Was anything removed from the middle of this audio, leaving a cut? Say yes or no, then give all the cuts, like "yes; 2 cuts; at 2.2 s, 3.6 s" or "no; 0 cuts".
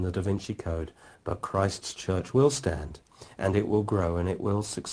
no; 0 cuts